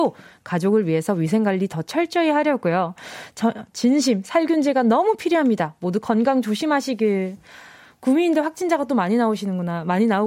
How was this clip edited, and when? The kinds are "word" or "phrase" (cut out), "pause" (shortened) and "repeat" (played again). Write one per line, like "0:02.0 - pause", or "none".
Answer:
none